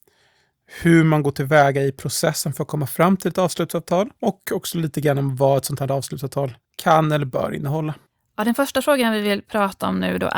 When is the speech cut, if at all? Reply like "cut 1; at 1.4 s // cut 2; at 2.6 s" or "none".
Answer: cut 1; at 4.2 s // cut 2; at 6.6 s // cut 3; at 8.1 s